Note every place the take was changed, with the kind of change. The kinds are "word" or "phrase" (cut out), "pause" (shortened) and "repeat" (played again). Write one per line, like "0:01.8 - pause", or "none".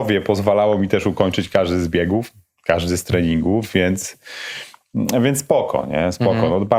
none